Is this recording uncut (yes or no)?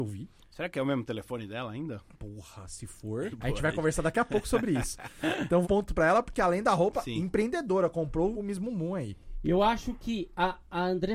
no